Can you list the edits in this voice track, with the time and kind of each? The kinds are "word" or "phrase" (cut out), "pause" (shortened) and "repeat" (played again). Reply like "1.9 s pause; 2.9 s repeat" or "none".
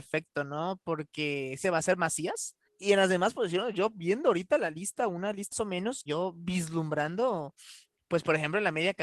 1.6 s phrase; 2.7 s pause; 5.5 s word; 6.1 s word